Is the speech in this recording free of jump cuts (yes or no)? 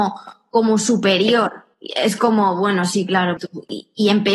no